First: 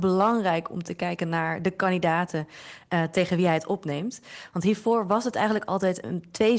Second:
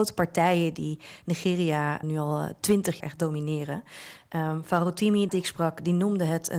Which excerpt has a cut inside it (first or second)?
second